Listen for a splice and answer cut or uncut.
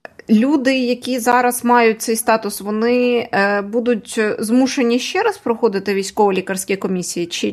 uncut